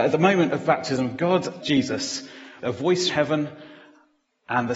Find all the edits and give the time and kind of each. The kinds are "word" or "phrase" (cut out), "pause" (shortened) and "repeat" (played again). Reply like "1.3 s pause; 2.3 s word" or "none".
1.6 s word; 2.6 s word; 3.1 s word